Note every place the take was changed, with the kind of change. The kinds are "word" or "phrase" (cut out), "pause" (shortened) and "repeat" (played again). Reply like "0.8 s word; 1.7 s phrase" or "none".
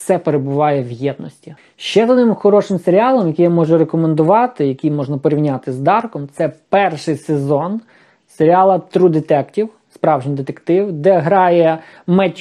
none